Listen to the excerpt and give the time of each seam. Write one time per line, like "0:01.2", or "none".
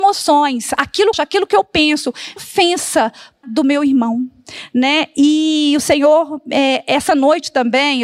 0:01.1
0:02.4
0:03.4